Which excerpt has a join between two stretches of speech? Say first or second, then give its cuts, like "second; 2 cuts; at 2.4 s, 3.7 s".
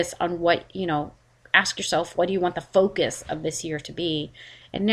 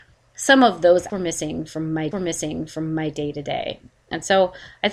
second; 2 cuts; at 1.1 s, 2.1 s